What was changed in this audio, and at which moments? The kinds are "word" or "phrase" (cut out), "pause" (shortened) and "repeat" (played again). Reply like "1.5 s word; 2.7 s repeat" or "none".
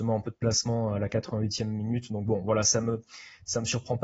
none

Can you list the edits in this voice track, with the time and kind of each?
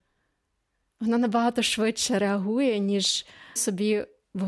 3.6 s word

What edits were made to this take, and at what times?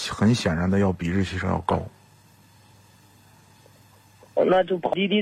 none

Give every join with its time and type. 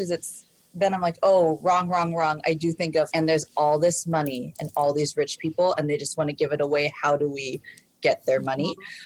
3.1 s word

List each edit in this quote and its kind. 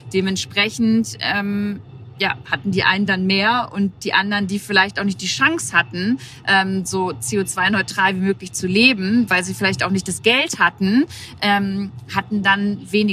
none

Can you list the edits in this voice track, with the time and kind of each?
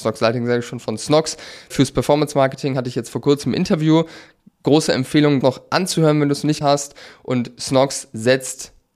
1.7 s word; 5.4 s word; 6.6 s word

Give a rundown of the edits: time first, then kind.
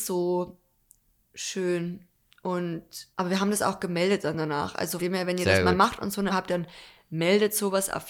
3.1 s pause; 5.0 s word; 6.3 s word

